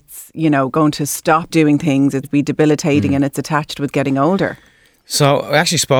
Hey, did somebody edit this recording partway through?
yes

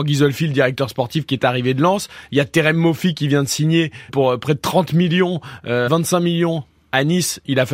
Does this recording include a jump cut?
yes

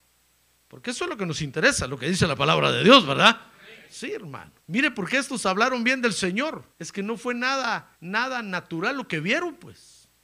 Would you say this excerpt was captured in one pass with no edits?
no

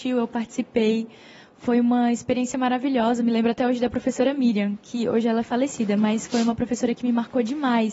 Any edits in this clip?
no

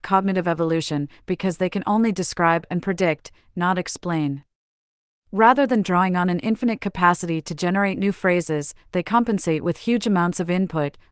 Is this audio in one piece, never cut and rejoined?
yes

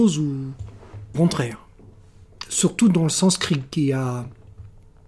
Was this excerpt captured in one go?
no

